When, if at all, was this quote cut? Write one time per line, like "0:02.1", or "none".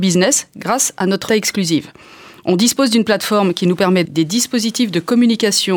0:01.3
0:04.1